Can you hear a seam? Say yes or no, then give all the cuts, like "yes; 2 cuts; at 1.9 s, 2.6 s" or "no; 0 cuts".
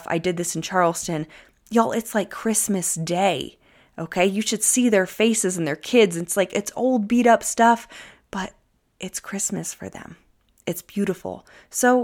no; 0 cuts